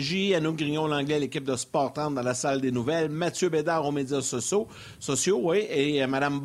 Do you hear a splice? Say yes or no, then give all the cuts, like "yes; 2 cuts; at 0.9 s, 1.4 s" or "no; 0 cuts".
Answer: no; 0 cuts